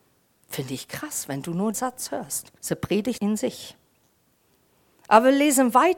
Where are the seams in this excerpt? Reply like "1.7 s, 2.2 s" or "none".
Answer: 1.7 s, 2.6 s